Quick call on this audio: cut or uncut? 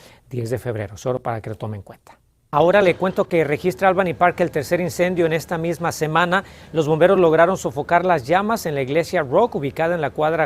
uncut